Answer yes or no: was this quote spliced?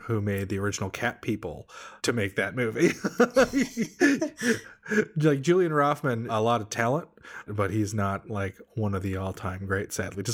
yes